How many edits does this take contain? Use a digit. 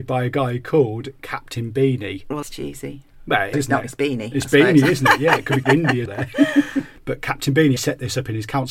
5